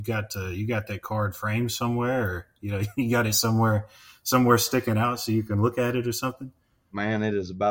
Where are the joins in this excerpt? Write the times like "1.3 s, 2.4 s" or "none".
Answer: none